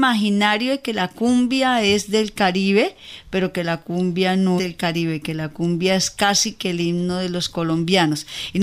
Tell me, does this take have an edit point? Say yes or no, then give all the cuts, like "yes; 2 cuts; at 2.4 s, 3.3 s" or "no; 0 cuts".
yes; 1 cut; at 4.6 s